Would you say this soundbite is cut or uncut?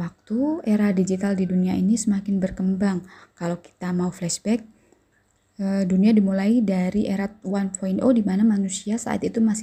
uncut